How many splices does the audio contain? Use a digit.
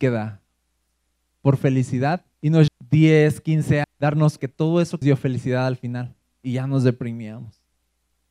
5